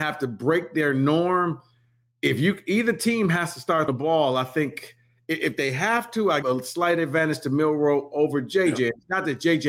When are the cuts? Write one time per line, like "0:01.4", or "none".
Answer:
0:03.9
0:06.4

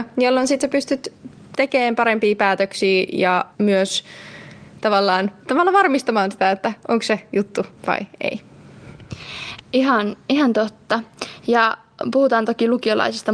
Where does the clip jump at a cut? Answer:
0:03.5
0:07.8

